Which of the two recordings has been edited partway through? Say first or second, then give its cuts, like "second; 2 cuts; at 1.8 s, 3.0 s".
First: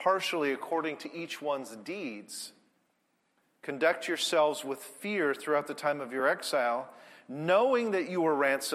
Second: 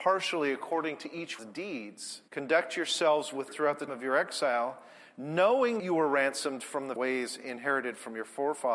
second; 6 cuts; at 1.4 s, 2.3 s, 3.5 s, 3.9 s, 5.8 s, 7.0 s